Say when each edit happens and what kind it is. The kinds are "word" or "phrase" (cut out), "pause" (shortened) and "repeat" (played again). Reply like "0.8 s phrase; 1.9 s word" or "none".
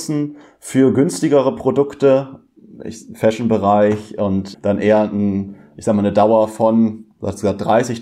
4.5 s word